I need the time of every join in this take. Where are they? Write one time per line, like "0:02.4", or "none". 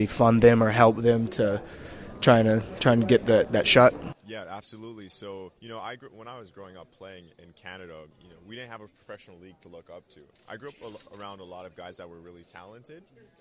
0:05.6
0:08.1
0:10.4